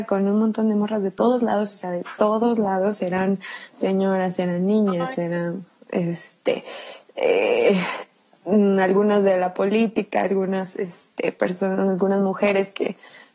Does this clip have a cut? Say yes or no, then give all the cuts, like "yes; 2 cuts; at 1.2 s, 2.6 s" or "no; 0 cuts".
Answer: no; 0 cuts